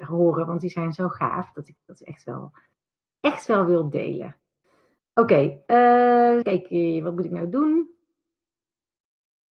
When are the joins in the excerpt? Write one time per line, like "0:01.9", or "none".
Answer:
0:06.4